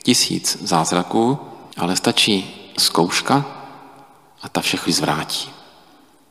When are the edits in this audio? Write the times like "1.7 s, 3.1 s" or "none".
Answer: 1.7 s, 2.8 s, 4.9 s